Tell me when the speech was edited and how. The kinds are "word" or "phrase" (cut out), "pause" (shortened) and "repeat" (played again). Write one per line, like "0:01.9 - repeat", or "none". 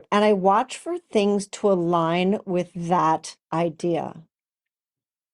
0:03.4 - pause